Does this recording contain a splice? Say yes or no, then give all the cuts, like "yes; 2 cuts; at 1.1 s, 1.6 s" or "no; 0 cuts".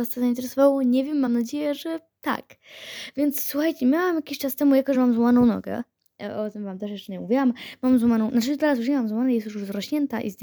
no; 0 cuts